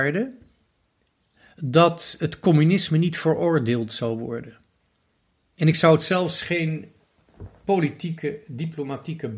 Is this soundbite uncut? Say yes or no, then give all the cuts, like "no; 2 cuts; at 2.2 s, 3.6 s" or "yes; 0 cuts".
yes; 0 cuts